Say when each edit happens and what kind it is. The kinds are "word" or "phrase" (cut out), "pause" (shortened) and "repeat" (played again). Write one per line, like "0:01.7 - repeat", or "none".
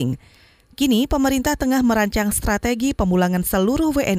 none